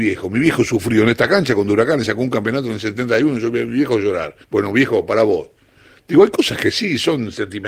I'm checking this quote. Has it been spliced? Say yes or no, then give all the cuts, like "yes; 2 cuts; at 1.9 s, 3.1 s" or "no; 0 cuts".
yes; 1 cut; at 4.4 s